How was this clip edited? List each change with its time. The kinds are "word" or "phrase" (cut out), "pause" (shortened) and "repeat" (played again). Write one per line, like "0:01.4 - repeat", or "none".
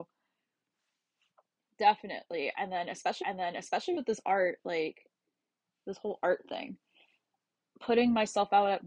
0:03.2 - repeat